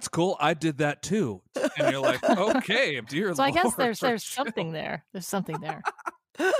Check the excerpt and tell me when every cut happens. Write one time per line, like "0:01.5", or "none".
0:01.5
0:03.0
0:04.0